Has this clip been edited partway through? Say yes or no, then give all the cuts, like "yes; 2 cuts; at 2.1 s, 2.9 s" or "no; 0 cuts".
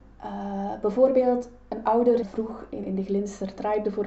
yes; 2 cuts; at 2.2 s, 2.8 s